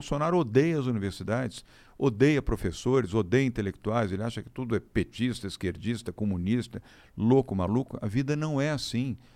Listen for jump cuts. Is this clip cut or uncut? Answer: uncut